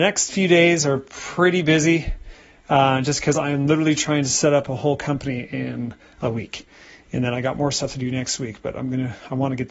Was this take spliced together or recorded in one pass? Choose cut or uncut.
uncut